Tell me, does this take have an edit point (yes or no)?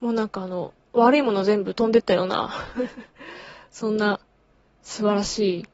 no